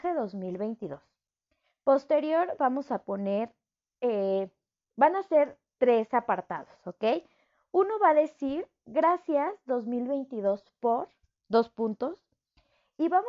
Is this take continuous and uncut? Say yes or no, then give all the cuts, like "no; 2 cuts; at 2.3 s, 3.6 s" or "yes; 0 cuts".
yes; 0 cuts